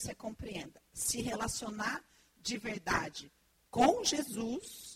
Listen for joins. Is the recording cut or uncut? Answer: uncut